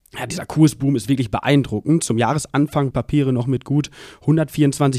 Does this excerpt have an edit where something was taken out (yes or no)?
yes